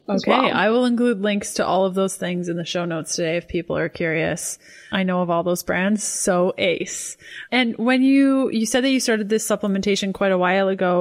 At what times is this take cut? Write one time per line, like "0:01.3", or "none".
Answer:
none

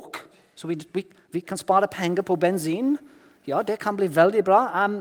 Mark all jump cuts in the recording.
none

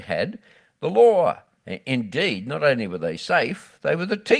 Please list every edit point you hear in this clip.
0:01.6

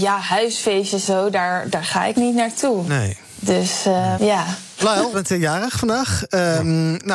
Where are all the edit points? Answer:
0:01.0
0:02.1
0:04.2
0:05.1

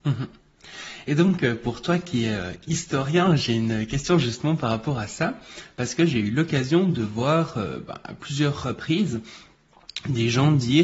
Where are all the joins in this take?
none

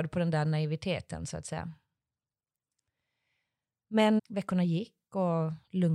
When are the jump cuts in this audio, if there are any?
0:04.2

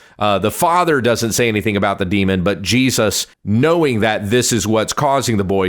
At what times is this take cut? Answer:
0:03.3

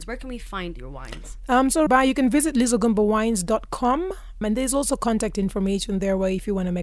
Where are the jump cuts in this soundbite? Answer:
0:01.9
0:04.4

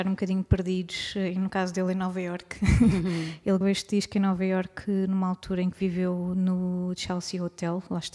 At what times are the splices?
0:03.6

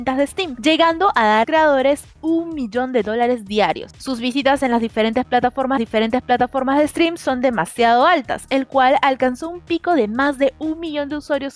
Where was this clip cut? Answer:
0:01.4
0:05.8

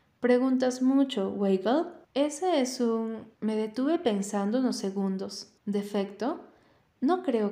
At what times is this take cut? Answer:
0:02.0
0:03.3
0:05.6

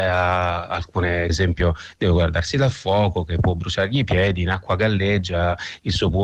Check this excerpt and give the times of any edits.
0:01.3

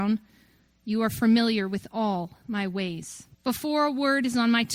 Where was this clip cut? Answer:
0:03.3

